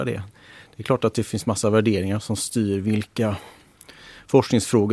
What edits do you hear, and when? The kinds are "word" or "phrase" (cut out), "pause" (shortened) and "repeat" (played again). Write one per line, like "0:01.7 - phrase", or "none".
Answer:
none